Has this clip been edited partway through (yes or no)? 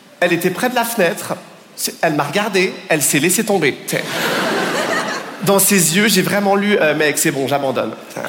no